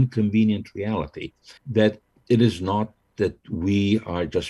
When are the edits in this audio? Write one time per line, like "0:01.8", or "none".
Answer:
0:01.6